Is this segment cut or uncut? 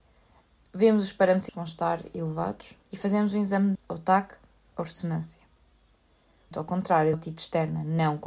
cut